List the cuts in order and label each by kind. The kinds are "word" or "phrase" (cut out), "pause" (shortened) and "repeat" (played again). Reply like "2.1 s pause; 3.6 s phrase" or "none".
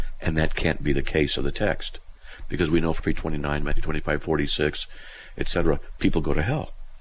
3.0 s word